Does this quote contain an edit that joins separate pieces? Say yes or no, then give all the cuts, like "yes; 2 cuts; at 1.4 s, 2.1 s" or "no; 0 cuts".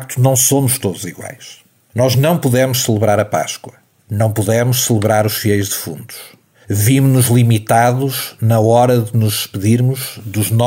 no; 0 cuts